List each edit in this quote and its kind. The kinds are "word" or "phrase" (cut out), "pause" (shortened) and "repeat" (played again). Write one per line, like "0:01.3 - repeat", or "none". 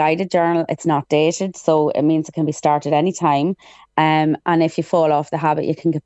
none